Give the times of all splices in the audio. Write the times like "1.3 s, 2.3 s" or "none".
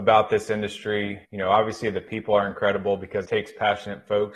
1.2 s, 3.2 s